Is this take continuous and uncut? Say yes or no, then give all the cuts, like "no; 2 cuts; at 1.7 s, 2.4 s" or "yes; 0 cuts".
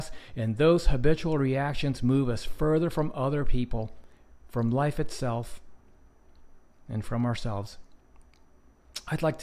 yes; 0 cuts